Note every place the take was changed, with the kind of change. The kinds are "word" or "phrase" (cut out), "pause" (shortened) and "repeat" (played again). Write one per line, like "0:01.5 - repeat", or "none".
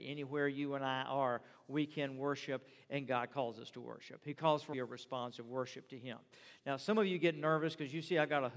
0:04.7 - phrase

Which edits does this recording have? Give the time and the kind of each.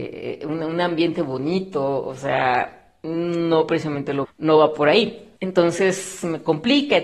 0:04.2 - word
0:05.4 - pause

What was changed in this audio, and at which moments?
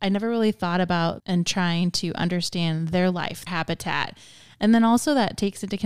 0:01.2 - word
0:03.5 - word

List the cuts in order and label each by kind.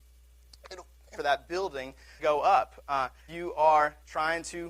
0:01.2 - phrase
0:02.2 - word
0:03.3 - word

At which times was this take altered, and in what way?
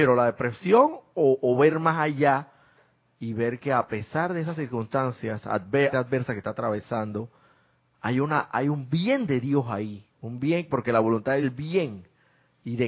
0:05.9 - word
0:10.1 - pause
0:11.4 - phrase

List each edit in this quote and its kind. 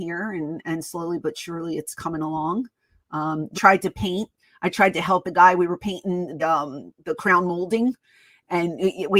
0:03.5 - phrase
0:05.2 - word
0:06.4 - word

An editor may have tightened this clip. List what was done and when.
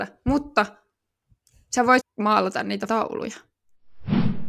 0:02.0 - phrase
0:02.9 - word

